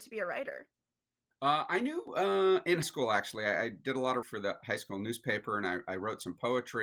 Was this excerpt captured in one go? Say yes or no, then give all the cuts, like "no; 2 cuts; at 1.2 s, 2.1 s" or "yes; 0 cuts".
no; 3 cuts; at 2.8 s, 4.2 s, 5.9 s